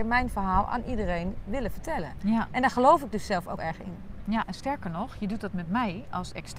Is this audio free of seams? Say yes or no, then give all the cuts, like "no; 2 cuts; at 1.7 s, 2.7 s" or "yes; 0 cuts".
no; 1 cut; at 3.6 s